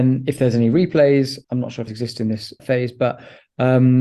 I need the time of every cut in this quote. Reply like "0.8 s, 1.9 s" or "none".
1.4 s, 1.9 s, 2.6 s